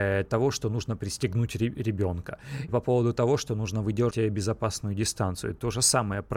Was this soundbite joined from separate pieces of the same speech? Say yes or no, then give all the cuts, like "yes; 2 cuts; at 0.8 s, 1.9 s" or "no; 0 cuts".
yes; 2 cuts; at 2.7 s, 4.1 s